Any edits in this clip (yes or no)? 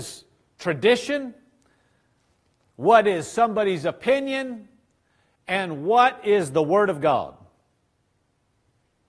no